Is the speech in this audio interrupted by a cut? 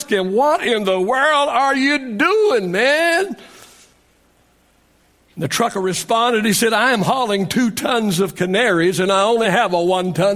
no; 0 cuts

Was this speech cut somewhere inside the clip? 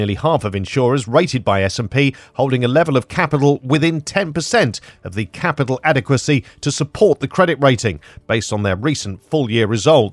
no; 0 cuts

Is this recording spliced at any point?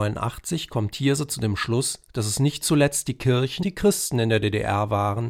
yes; 1 cut; at 3.6 s

